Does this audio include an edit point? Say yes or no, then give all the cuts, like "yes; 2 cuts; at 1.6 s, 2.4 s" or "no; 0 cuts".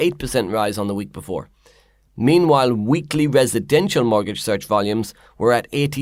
no; 0 cuts